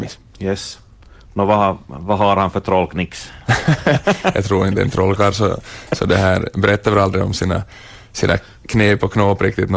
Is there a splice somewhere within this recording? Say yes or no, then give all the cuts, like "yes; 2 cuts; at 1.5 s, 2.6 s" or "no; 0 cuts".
no; 0 cuts